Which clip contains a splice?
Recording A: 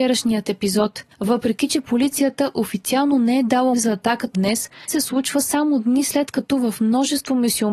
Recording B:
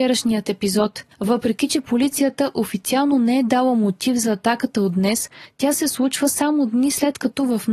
A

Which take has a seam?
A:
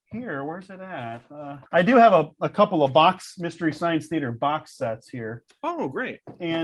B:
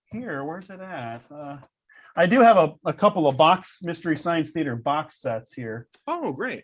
A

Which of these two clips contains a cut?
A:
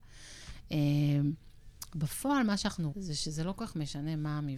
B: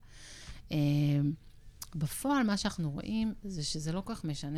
A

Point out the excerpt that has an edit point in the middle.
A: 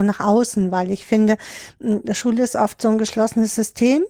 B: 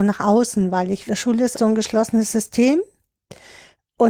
B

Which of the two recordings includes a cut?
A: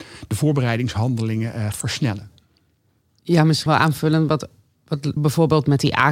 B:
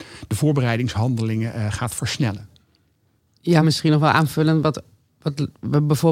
A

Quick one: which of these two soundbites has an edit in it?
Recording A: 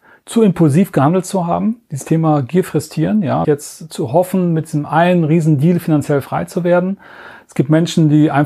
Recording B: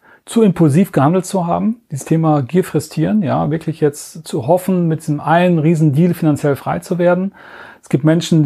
A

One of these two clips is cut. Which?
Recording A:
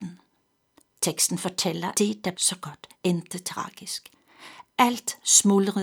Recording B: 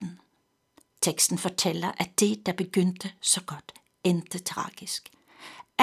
A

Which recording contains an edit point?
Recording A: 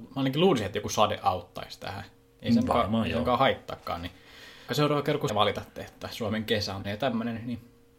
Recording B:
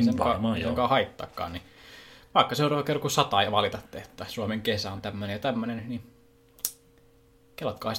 A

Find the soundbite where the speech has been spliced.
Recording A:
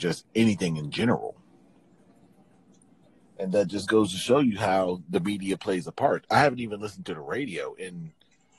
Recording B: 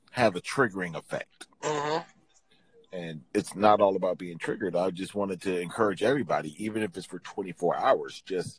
B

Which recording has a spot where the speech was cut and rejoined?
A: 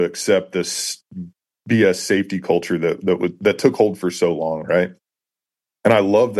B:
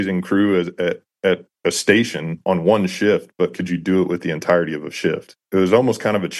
B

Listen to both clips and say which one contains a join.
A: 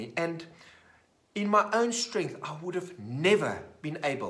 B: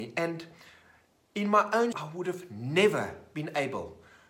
B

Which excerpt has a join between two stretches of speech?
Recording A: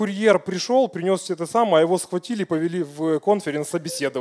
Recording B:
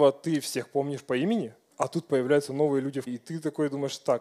B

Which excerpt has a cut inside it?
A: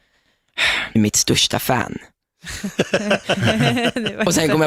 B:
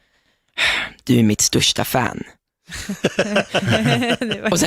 A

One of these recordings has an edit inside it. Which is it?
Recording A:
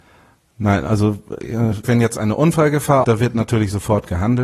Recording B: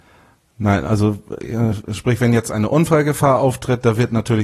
A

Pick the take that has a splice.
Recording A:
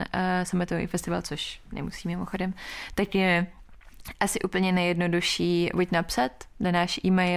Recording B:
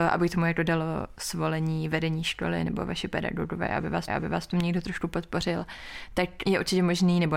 B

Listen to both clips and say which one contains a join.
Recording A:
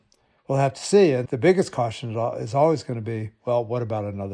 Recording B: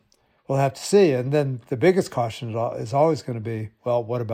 A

